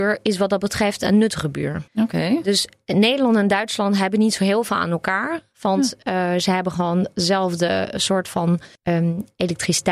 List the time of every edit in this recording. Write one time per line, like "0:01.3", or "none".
0:01.9
0:08.8